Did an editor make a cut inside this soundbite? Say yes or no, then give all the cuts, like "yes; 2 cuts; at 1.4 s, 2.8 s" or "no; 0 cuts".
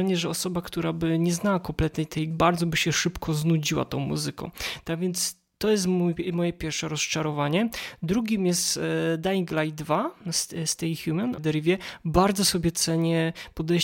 yes; 2 cuts; at 2.3 s, 11.4 s